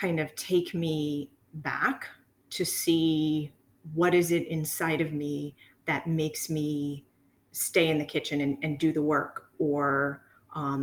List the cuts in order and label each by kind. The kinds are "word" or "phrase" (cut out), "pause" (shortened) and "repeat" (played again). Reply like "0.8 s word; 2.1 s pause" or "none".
none